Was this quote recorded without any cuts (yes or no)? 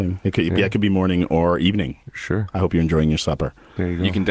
yes